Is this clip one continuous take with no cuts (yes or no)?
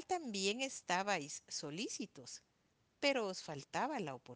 yes